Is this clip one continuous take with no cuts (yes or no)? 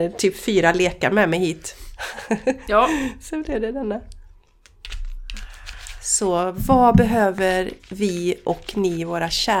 no